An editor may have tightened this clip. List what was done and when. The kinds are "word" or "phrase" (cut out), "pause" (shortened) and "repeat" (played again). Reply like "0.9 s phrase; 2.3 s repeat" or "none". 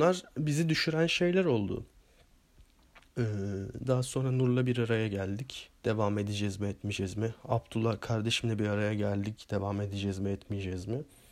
3.0 s pause; 5.8 s pause